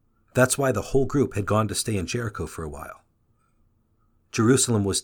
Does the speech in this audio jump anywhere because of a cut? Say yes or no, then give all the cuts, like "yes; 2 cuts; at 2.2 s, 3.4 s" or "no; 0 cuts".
no; 0 cuts